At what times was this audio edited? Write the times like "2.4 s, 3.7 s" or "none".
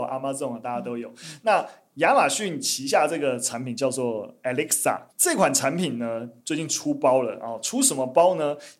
5.1 s